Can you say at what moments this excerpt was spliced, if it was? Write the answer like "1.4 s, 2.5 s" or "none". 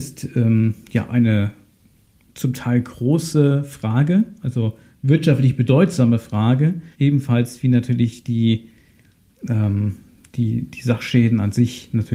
1.1 s, 6.9 s